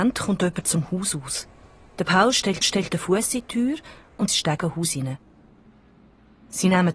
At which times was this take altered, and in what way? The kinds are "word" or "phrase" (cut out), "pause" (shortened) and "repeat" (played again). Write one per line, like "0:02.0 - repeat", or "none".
0:02.6 - repeat
0:04.3 - phrase